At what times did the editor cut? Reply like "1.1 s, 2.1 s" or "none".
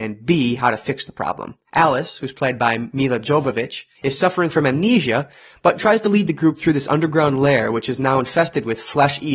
1.7 s, 5.8 s